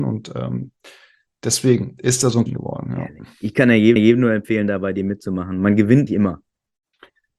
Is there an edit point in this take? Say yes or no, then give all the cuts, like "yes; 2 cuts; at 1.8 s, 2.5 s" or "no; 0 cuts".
yes; 3 cuts; at 2.5 s, 4.0 s, 6.1 s